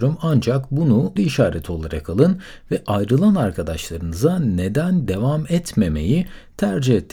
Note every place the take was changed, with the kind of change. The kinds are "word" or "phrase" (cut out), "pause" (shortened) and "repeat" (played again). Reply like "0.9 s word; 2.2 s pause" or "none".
1.2 s phrase